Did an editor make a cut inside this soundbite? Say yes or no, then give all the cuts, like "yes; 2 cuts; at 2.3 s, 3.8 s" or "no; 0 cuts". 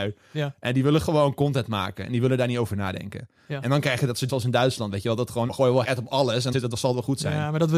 yes; 4 cuts; at 4.3 s, 5.5 s, 5.8 s, 6.5 s